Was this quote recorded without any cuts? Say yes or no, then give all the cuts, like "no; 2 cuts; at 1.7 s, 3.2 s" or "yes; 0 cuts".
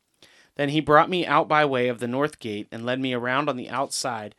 yes; 0 cuts